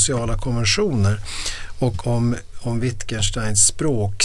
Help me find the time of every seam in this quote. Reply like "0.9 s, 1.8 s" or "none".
2.0 s